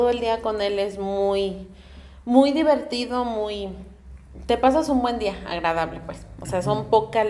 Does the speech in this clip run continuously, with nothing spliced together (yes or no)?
yes